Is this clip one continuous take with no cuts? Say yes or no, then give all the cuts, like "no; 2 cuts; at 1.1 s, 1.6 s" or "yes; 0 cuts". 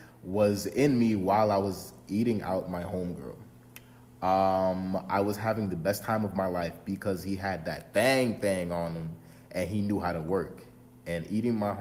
yes; 0 cuts